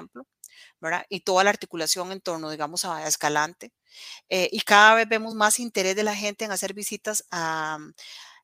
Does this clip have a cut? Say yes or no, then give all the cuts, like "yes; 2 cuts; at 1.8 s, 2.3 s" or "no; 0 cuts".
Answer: no; 0 cuts